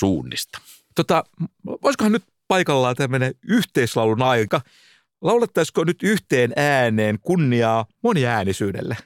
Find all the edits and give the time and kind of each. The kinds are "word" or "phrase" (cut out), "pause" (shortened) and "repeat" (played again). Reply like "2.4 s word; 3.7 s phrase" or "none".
none